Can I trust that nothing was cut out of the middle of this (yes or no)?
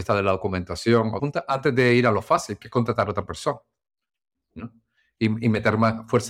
no